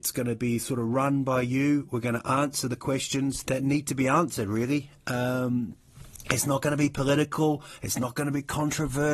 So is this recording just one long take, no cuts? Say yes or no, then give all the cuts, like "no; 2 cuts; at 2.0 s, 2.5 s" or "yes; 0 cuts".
no; 1 cut; at 3.4 s